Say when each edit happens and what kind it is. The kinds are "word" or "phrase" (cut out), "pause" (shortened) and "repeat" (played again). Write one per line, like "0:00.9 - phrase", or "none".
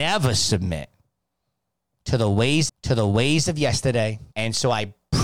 0:02.7 - repeat
0:04.3 - pause